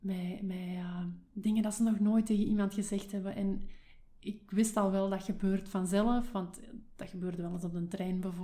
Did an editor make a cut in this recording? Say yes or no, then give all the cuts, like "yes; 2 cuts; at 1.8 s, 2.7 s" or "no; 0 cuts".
no; 0 cuts